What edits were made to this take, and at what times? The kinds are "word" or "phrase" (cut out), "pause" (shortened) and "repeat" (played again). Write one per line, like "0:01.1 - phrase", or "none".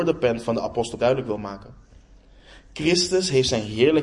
0:01.0 - word